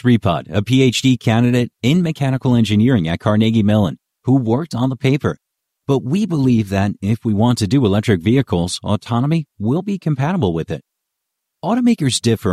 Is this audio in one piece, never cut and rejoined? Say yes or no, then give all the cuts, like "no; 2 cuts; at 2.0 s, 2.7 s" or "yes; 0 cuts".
yes; 0 cuts